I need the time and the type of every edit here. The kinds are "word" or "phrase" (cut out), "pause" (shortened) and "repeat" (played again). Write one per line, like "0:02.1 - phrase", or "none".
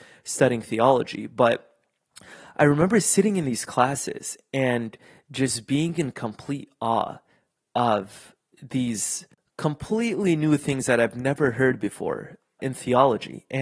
0:12.6 - word